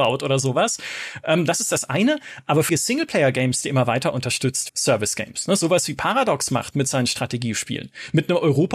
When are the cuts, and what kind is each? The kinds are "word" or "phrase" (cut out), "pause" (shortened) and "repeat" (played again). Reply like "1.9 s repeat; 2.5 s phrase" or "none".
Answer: 2.7 s phrase; 4.7 s word

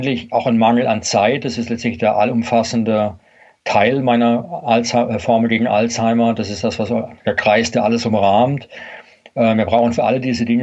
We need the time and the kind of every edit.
none

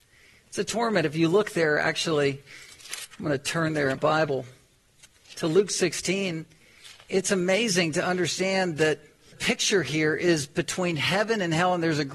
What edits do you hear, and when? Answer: 3.9 s word; 9.3 s word

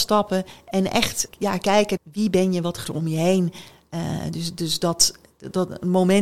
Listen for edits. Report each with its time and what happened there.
1.3 s word; 2.0 s word; 2.8 s word

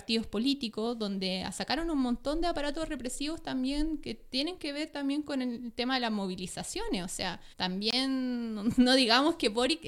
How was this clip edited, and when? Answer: 7.5 s pause

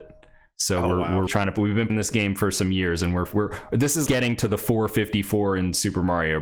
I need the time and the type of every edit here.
1.3 s word; 1.9 s word; 4.1 s word

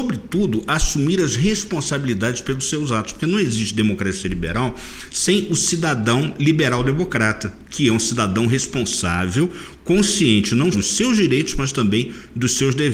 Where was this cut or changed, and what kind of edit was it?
10.7 s word

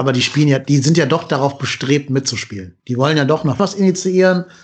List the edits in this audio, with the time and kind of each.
2.8 s pause; 3.6 s word

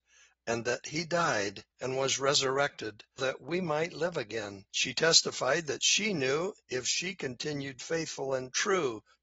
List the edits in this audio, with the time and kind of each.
1.7 s pause; 3.2 s word; 4.7 s pause; 6.6 s pause

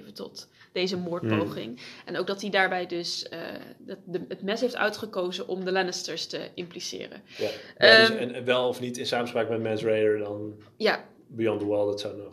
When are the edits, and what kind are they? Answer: none

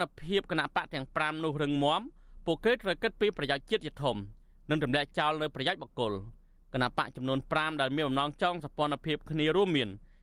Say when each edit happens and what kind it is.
none

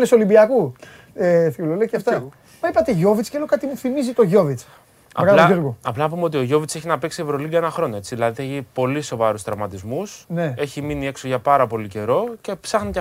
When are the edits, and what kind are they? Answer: 10.2 s pause

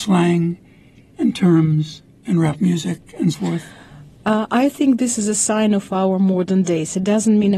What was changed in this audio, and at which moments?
3.3 s word

